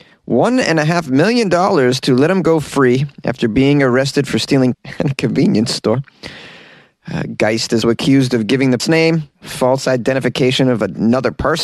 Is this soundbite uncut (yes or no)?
no